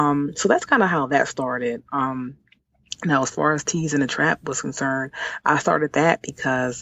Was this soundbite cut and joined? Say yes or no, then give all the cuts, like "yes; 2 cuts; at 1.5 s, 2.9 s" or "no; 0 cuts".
no; 0 cuts